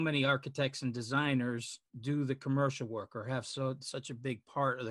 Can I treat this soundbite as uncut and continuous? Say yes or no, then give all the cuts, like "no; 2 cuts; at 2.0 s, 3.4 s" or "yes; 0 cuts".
no; 1 cut; at 1.9 s